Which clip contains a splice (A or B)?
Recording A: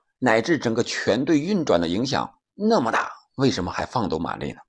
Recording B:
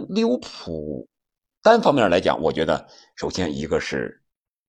A